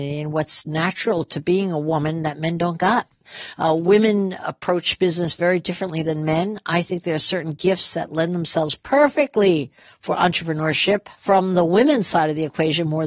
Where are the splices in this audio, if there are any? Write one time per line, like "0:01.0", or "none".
none